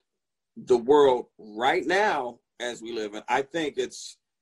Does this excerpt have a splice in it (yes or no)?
yes